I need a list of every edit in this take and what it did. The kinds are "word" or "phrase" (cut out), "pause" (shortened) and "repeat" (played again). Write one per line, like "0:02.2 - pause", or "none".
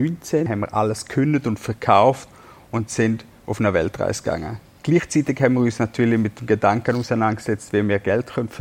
none